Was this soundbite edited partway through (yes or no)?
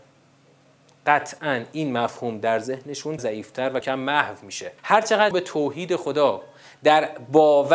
yes